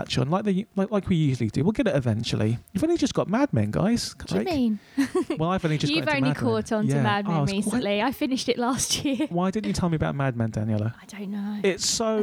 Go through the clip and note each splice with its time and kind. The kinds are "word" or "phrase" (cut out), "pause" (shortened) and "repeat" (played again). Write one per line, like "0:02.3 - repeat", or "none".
0:04.3 - phrase